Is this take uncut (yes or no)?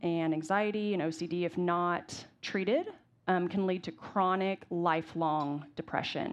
yes